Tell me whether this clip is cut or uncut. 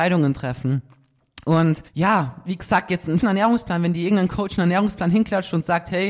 cut